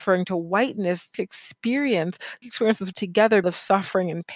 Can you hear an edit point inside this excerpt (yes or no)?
yes